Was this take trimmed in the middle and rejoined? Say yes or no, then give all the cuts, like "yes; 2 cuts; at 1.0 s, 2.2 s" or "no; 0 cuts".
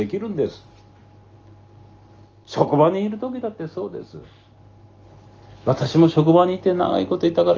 no; 0 cuts